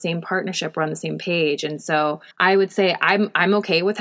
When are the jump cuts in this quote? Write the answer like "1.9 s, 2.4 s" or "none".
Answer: 2.3 s